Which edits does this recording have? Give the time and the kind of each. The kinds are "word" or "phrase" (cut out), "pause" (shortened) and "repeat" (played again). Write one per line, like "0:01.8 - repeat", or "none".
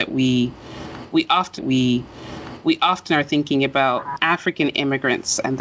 0:01.6 - repeat